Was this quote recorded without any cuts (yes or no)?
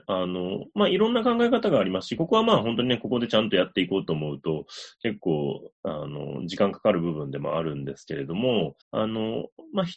no